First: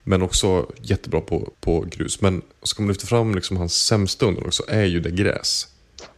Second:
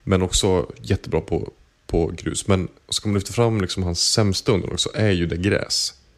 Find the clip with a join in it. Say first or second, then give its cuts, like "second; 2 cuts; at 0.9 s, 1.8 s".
first; 1 cut; at 1.5 s